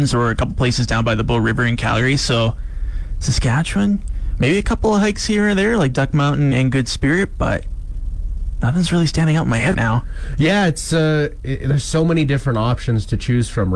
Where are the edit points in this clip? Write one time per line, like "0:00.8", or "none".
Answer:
0:06.5
0:09.7